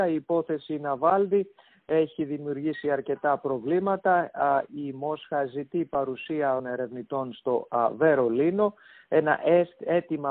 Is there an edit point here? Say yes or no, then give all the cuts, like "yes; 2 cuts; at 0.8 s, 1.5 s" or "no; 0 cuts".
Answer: yes; 1 cut; at 6.6 s